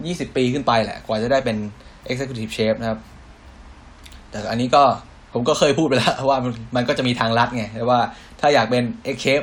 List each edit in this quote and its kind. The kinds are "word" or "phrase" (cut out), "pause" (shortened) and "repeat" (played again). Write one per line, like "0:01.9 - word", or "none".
none